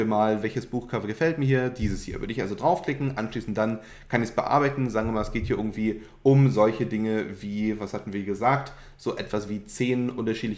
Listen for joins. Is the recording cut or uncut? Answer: uncut